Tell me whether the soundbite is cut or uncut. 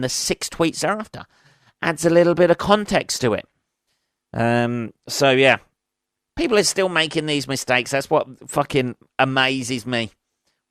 uncut